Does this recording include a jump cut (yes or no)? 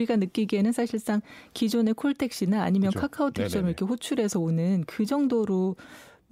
no